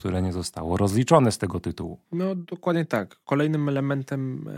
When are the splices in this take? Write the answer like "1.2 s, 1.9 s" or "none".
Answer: 2.0 s, 3.2 s